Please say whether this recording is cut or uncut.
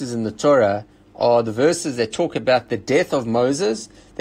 uncut